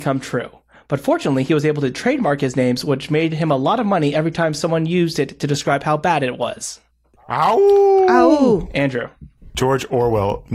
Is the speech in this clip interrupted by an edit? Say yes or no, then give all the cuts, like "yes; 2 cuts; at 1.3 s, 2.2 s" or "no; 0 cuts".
no; 0 cuts